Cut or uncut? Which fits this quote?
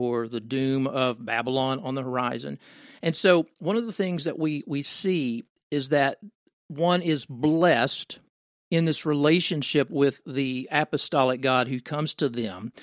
uncut